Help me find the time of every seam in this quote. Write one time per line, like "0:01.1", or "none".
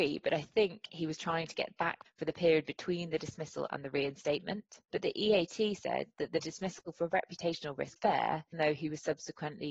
0:02.1
0:04.8
0:08.0
0:08.5

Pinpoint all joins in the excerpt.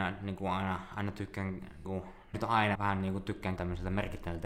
0:01.8
0:02.3
0:02.7
0:03.6

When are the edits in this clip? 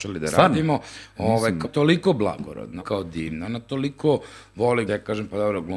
0:01.6
0:02.8
0:04.9

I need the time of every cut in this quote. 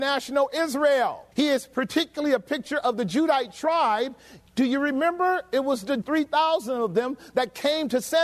0:01.3
0:06.0

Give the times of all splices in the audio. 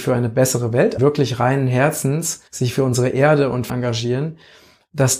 0:01.0
0:02.5
0:03.7

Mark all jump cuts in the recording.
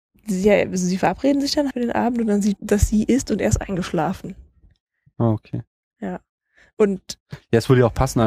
0:01.7
0:02.6

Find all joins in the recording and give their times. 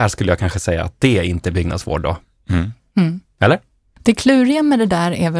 none

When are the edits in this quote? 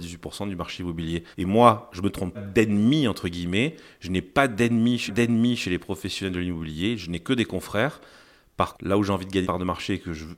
0:01.3
0:02.3
0:05.1
0:08.7
0:09.4

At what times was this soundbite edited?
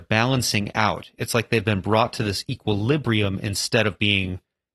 none

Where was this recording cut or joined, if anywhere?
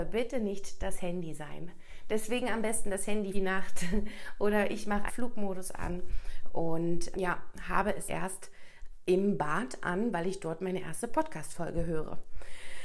0:03.3
0:05.1
0:07.1
0:08.1

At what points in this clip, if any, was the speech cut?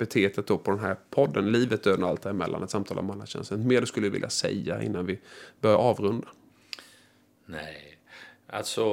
none

